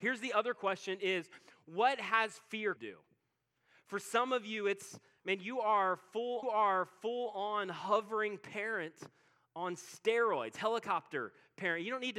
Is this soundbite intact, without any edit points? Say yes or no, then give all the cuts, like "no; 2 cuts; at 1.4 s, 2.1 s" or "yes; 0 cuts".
no; 2 cuts; at 2.8 s, 6.4 s